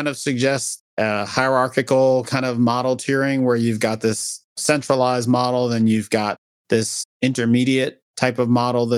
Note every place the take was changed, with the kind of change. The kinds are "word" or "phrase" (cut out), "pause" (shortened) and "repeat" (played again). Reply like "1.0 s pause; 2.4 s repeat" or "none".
none